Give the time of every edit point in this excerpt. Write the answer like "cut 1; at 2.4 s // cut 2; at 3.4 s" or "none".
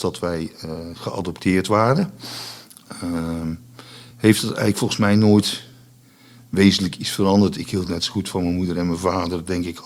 none